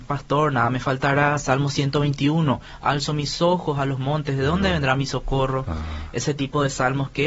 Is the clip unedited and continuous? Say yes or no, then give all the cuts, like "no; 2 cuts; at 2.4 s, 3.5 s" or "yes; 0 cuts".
yes; 0 cuts